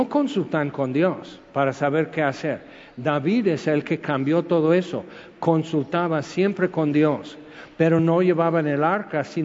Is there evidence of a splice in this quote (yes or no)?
no